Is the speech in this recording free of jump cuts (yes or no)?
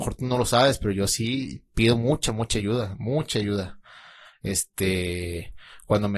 yes